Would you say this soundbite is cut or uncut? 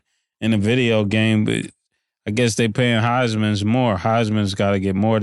uncut